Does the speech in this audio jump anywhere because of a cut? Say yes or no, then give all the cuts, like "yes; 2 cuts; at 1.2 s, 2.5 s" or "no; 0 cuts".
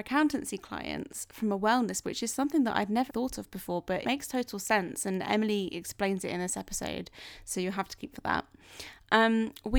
yes; 4 cuts; at 2.0 s, 3.1 s, 4.0 s, 8.1 s